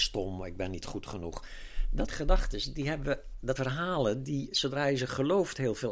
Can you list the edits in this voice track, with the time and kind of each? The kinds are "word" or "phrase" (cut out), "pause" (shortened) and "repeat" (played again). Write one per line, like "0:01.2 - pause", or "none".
0:02.1 - word
0:03.6 - word